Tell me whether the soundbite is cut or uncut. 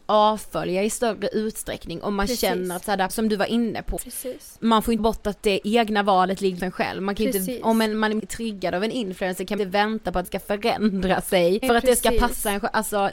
cut